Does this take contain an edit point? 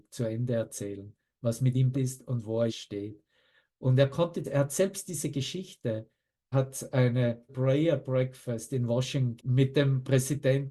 yes; 6 cuts; at 1.9 s, 2.7 s, 4.4 s, 6.5 s, 7.5 s, 9.4 s

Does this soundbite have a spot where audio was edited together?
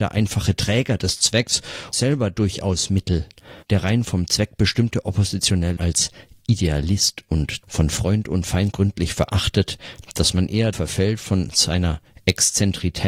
yes; 6 cuts; at 1.9 s, 3.6 s, 5.8 s, 7.6 s, 8.7 s, 10.7 s

